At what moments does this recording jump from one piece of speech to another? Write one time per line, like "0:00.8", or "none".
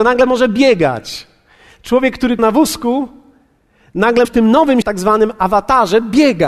0:02.4
0:04.2
0:04.8